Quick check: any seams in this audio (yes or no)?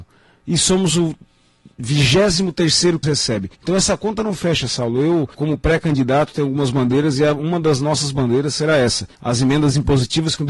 yes